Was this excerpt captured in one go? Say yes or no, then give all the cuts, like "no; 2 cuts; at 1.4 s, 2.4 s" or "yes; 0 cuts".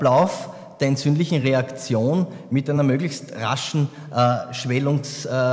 yes; 0 cuts